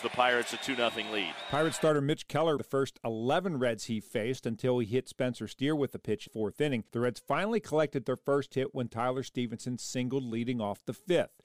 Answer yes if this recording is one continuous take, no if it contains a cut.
no